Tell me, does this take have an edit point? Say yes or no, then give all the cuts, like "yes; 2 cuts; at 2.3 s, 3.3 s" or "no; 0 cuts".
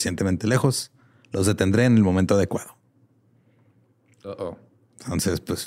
no; 0 cuts